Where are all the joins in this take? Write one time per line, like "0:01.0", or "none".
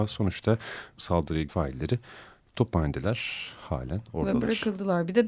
0:01.0
0:01.5